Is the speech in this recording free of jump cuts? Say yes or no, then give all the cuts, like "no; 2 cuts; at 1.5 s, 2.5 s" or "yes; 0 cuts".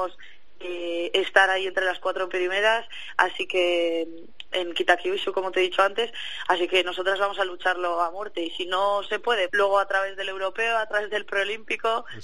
no; 1 cut; at 9.5 s